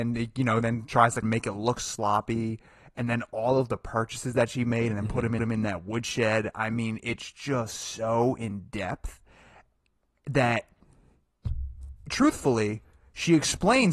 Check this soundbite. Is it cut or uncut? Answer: cut